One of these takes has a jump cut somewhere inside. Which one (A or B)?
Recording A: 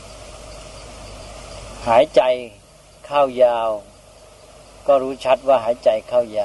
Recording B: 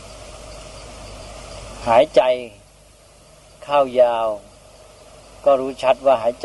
A